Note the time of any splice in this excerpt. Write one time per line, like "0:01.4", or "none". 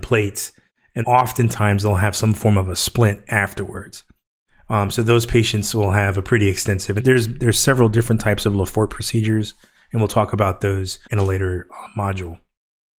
0:01.0
0:07.0
0:11.0